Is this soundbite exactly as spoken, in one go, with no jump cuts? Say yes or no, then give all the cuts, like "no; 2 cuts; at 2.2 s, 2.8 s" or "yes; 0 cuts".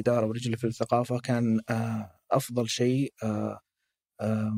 yes; 0 cuts